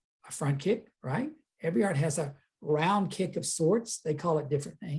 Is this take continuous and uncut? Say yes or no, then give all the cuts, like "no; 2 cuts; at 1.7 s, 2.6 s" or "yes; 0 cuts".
no; 1 cut; at 0.9 s